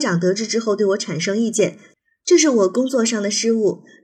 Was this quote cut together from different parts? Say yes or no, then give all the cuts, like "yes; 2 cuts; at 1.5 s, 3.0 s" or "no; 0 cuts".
no; 0 cuts